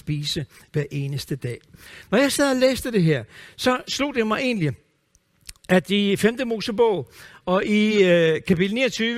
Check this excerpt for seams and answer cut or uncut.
uncut